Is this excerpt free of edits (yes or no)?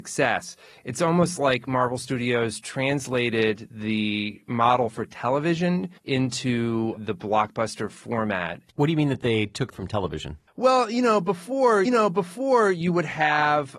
no